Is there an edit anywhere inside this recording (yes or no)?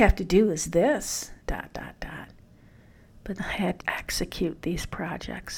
yes